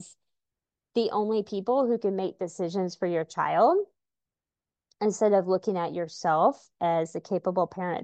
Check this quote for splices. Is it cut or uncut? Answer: uncut